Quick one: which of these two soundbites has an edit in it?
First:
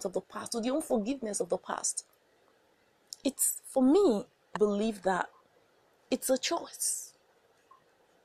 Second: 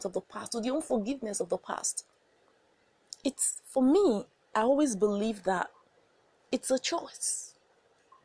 first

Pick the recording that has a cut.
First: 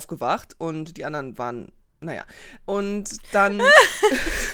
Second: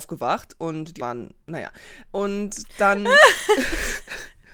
second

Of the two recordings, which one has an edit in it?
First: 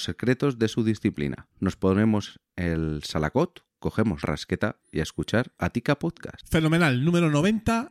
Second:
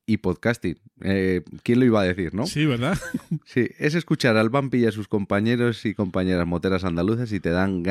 first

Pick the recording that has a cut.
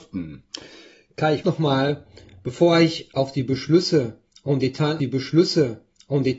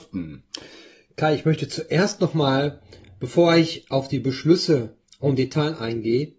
first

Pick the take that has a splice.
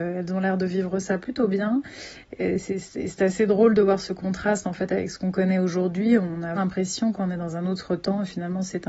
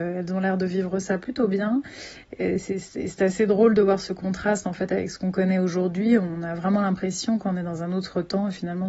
first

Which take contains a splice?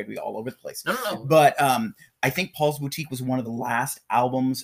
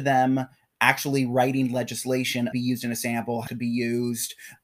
second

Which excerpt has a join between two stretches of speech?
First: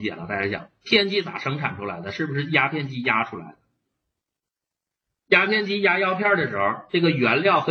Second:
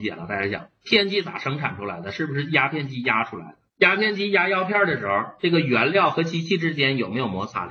second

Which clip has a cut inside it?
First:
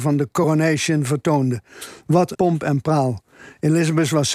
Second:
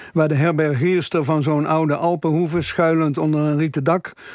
first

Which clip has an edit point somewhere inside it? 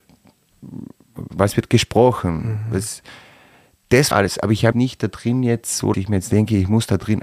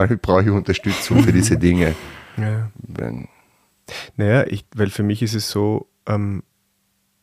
first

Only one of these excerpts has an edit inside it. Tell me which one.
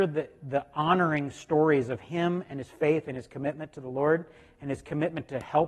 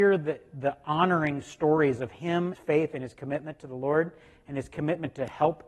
second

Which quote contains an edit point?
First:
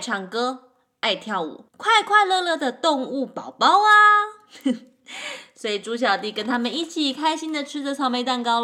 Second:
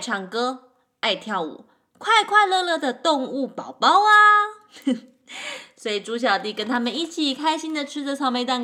first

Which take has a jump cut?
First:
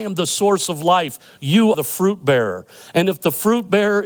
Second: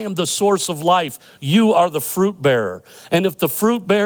first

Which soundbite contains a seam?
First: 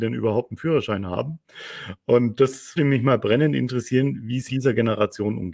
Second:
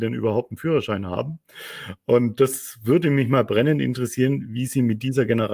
first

